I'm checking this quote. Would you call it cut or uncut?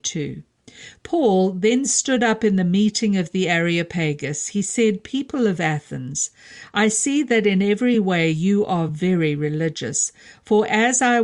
uncut